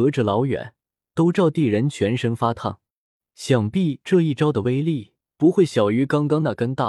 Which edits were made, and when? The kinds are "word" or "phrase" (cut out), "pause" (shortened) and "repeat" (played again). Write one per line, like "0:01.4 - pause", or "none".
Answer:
none